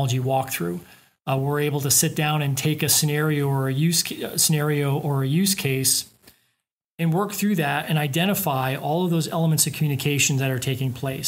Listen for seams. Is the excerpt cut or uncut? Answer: uncut